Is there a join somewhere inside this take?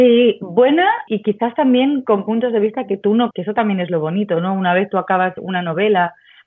yes; 3 cuts; at 1.1 s, 3.3 s, 5.4 s

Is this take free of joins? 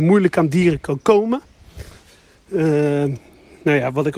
yes; 0 cuts

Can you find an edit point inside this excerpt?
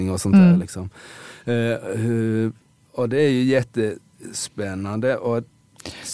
no; 0 cuts

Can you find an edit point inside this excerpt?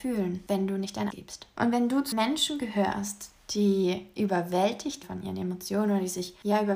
yes; 3 cuts; at 1.1 s, 2.1 s, 5.0 s

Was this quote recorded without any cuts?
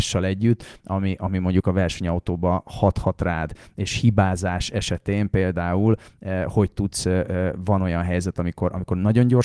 yes; 0 cuts

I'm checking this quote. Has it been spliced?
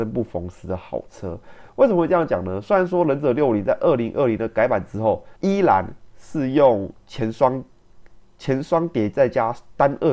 yes; 2 cuts; at 1.7 s, 5.4 s

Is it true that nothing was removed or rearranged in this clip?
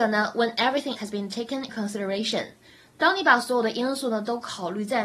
no; 2 cuts; at 1.0 s, 1.7 s

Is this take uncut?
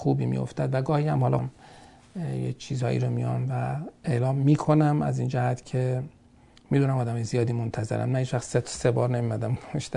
no; 1 cut; at 1.4 s

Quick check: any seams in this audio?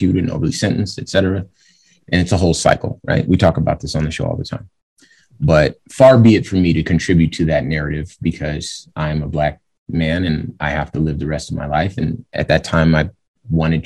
no; 0 cuts

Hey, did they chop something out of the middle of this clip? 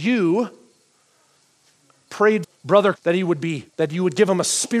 yes; 3 cuts; at 2.4 s, 3.0 s, 3.7 s

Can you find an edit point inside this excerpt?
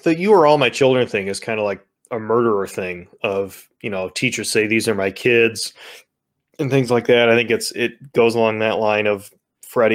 no; 0 cuts

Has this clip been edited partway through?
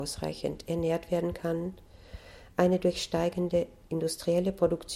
no; 0 cuts

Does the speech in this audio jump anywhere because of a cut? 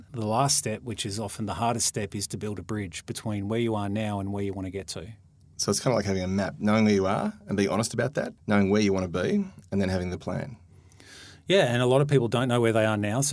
yes; 1 cut; at 8.4 s

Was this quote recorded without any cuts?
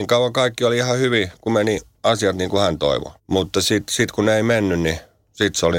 no; 1 cut; at 3.2 s

